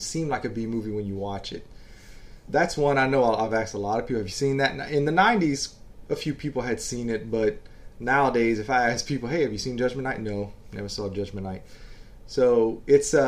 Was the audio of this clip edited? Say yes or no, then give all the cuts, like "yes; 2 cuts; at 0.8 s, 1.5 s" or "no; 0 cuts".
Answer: yes; 1 cut; at 2.5 s